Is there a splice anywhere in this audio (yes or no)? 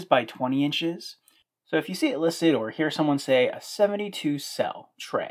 no